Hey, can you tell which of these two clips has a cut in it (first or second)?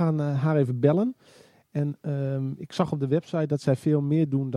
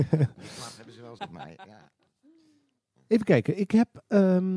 second